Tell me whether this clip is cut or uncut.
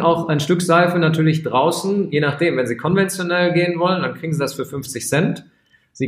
uncut